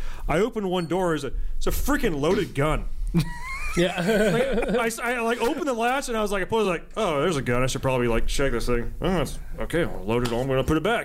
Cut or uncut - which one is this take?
uncut